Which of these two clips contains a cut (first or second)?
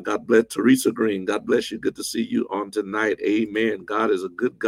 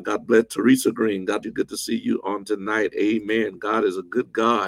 second